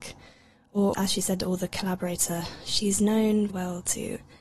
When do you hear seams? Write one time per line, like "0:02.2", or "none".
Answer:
0:00.9
0:03.5